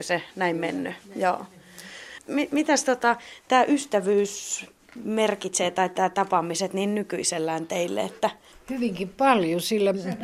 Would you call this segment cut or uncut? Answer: uncut